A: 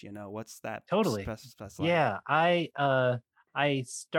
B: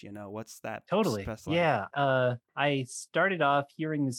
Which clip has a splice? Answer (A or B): B